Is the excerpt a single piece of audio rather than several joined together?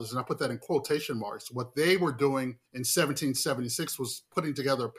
no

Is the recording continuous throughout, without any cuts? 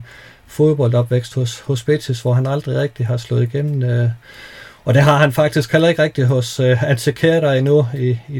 yes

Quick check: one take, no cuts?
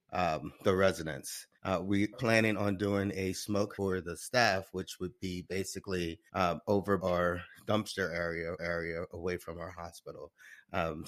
no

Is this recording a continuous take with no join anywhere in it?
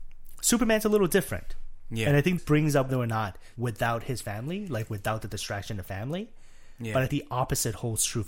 no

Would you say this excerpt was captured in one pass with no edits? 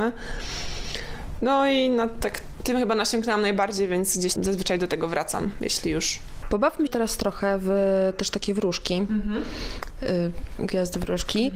no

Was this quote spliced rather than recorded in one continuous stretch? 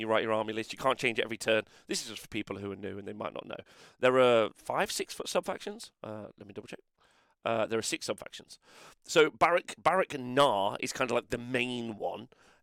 yes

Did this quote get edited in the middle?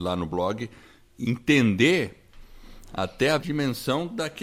yes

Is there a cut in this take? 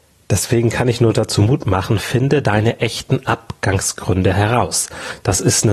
no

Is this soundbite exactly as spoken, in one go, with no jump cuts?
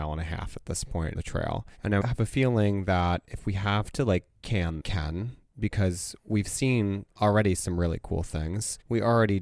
no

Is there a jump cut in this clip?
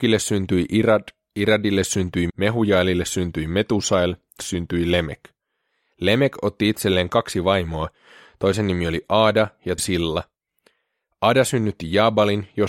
yes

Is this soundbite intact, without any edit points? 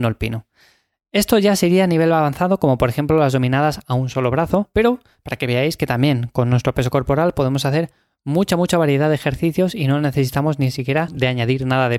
yes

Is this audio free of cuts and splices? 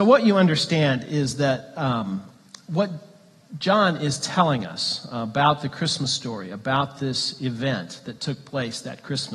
yes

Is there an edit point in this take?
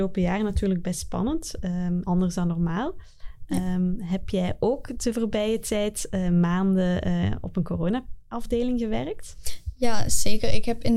yes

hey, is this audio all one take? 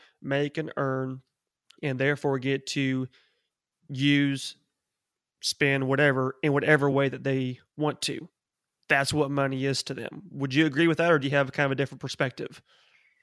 yes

